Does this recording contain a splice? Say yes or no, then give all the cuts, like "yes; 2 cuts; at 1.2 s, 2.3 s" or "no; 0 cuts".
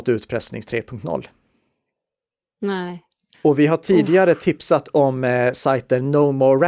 yes; 1 cut; at 3.3 s